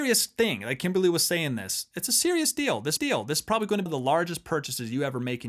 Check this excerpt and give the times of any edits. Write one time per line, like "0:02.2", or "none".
0:03.0
0:03.9